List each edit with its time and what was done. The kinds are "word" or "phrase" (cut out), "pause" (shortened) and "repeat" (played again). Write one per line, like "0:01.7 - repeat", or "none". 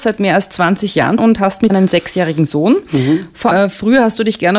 0:01.2 - word
0:01.7 - word
0:03.5 - word